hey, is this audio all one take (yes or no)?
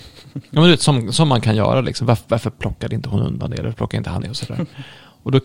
no